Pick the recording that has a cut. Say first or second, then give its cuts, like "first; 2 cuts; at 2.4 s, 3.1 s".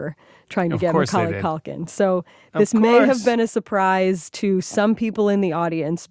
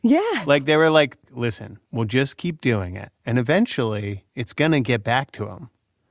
second; 3 cuts; at 1.8 s, 3.1 s, 4.3 s